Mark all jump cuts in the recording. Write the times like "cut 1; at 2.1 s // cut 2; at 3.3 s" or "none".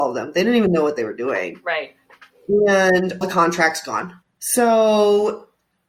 cut 1; at 3.2 s